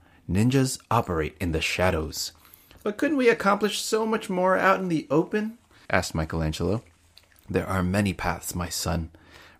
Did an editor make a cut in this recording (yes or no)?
no